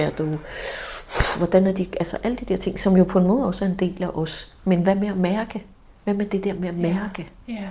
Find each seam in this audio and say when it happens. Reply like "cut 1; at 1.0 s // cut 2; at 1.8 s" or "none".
cut 1; at 5.9 s